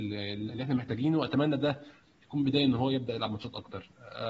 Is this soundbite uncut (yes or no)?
yes